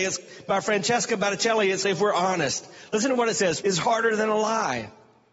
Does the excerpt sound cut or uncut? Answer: cut